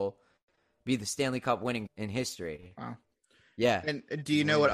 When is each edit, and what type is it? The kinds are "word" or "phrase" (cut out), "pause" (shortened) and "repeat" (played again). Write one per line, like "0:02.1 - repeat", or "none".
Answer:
0:01.9 - word

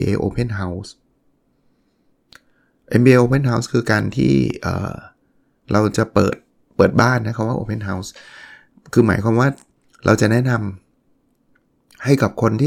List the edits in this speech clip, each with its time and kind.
none

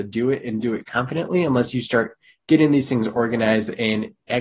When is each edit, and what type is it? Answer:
none

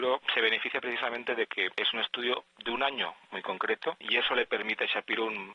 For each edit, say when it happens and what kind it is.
none

